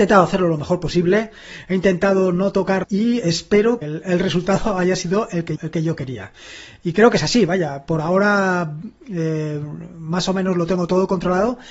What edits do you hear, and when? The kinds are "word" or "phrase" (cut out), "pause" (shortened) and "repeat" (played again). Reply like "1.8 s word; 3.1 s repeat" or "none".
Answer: 2.8 s phrase; 3.8 s phrase; 5.6 s word